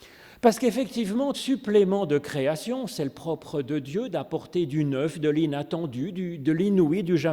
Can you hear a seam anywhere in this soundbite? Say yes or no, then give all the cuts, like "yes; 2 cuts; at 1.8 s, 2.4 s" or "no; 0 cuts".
yes; 1 cut; at 1.3 s